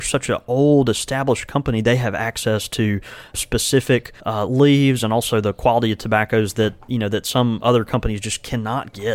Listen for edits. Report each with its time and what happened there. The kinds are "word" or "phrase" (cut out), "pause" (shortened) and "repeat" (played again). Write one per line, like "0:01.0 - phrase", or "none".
0:04.2 - pause